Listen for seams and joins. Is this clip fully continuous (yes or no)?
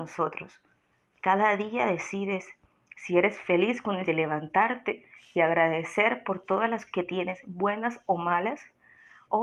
no